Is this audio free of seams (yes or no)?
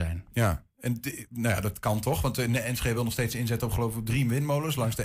yes